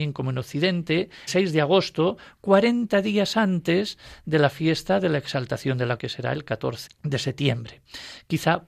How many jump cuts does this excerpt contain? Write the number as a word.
three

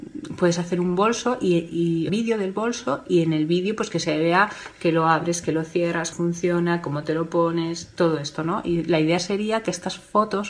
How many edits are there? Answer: two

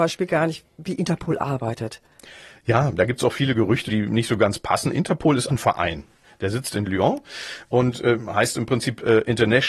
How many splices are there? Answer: two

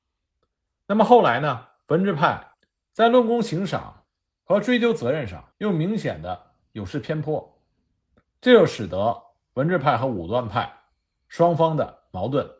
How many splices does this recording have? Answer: one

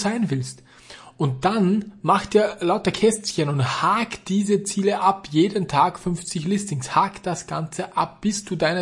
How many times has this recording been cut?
zero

